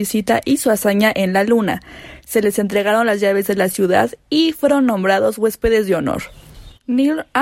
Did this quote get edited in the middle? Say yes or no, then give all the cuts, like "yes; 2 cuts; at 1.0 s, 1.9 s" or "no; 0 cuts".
no; 0 cuts